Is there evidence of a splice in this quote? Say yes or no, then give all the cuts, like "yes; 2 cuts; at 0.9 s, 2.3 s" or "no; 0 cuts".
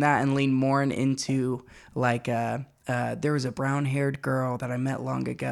no; 0 cuts